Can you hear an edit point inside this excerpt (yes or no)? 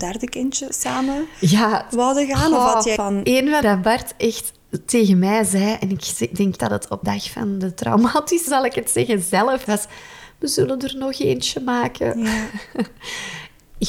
yes